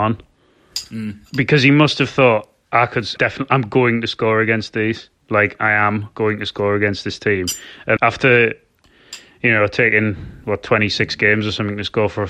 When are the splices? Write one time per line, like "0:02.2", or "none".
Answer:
0:03.2
0:08.0